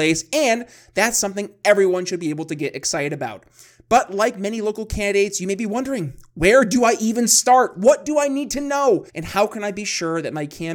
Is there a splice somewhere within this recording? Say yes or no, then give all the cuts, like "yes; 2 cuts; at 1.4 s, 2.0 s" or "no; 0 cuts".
yes; 1 cut; at 9.1 s